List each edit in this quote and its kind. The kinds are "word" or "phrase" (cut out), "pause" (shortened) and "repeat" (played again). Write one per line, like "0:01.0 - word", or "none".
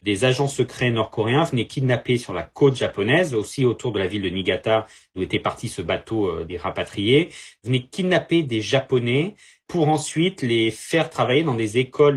none